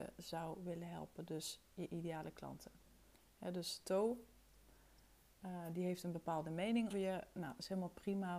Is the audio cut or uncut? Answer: cut